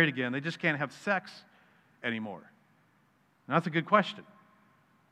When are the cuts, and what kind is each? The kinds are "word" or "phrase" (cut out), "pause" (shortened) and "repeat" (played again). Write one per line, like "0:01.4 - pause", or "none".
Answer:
none